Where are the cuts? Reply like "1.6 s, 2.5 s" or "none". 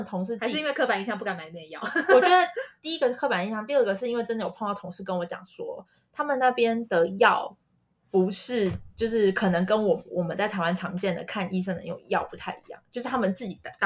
none